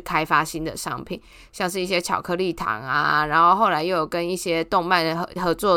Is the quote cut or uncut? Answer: uncut